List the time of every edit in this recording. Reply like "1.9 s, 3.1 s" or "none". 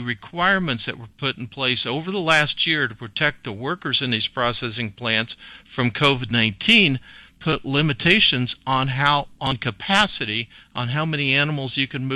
none

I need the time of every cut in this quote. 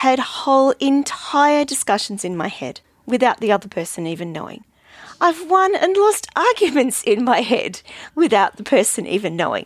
none

